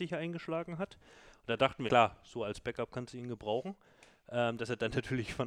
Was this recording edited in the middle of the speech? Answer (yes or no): yes